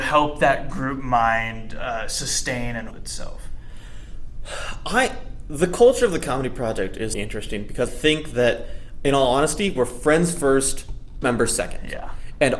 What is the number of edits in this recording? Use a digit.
4